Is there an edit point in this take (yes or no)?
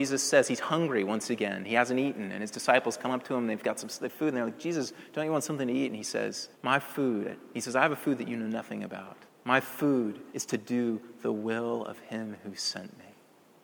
yes